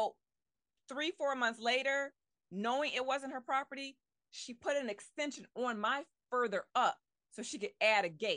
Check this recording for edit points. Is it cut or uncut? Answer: cut